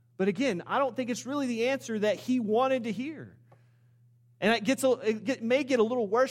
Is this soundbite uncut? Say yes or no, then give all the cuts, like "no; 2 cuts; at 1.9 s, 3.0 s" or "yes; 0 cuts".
yes; 0 cuts